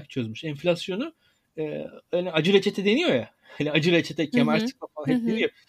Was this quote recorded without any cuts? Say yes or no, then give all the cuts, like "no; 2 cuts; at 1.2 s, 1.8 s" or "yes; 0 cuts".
yes; 0 cuts